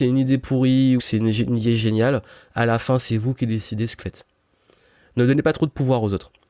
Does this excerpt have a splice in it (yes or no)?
yes